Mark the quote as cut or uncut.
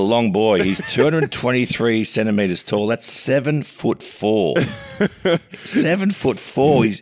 uncut